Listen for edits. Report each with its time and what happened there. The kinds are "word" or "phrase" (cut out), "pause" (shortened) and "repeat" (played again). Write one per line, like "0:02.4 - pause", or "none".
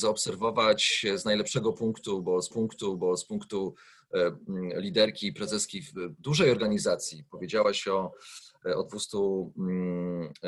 0:02.5 - repeat